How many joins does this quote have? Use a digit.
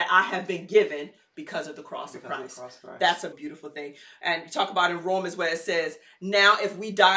1